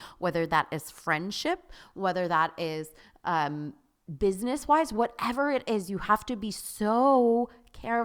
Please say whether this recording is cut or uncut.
uncut